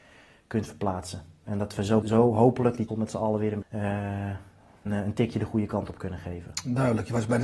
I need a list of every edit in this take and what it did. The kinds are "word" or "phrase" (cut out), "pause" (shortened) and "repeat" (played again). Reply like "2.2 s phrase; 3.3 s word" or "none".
2.0 s word; 2.9 s word; 3.6 s word; 4.9 s word